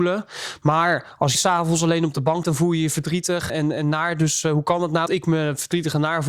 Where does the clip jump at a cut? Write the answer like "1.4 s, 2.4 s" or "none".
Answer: 1.3 s, 2.4 s, 3.5 s, 5.1 s